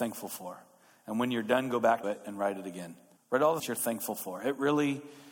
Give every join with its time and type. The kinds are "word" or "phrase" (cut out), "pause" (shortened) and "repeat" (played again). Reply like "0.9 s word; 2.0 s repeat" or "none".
2.0 s word; 3.2 s pause; 3.6 s phrase